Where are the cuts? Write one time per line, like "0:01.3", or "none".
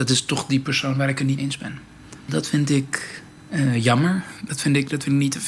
0:01.4
0:02.2
0:03.3